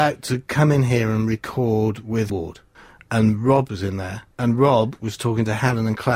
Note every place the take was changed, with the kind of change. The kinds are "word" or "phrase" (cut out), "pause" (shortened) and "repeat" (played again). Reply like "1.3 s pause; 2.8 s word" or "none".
2.3 s word; 2.7 s pause; 4.3 s pause